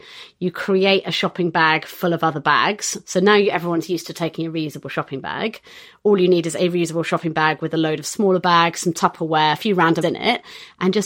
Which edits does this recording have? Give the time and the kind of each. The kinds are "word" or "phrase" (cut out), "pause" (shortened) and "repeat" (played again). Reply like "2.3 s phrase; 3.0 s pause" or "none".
10.0 s word